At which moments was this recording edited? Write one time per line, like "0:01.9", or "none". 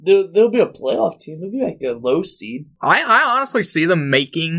none